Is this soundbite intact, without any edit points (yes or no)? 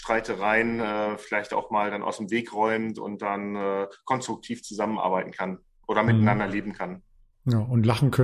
yes